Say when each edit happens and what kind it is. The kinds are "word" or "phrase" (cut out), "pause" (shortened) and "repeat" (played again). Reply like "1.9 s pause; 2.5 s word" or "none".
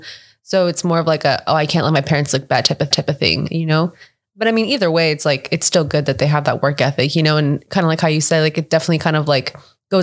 2.9 s repeat